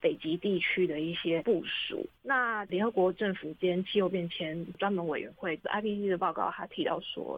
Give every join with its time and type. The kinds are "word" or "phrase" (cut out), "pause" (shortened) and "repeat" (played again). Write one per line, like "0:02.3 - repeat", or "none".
none

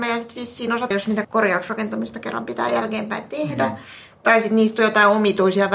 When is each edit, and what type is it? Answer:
0:00.9 - word
0:01.2 - word

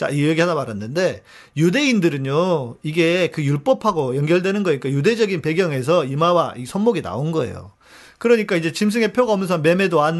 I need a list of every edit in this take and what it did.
none

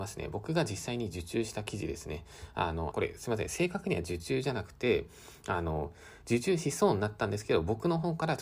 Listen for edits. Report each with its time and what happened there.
0:02.9 - word

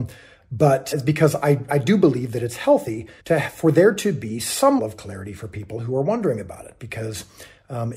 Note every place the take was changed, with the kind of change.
0:00.9 - word
0:01.7 - word
0:03.2 - pause
0:04.8 - word

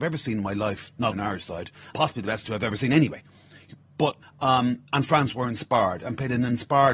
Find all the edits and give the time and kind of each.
0:01.1 - word
0:01.9 - word
0:04.2 - pause

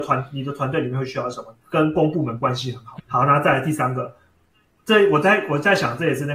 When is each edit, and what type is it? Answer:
0:01.6 - pause
0:03.0 - word

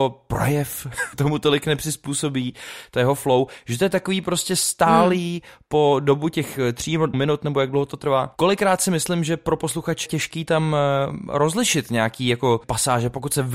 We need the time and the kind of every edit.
0:01.1 - word
0:07.1 - word
0:10.1 - word
0:12.6 - word

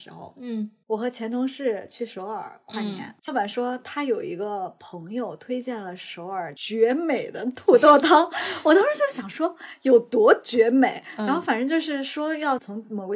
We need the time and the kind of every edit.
0:03.3 - word

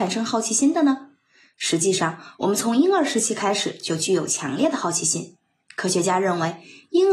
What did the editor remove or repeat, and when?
none

